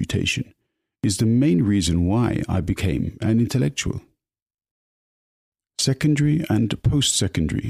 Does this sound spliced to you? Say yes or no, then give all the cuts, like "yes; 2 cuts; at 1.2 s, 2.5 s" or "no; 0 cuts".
no; 0 cuts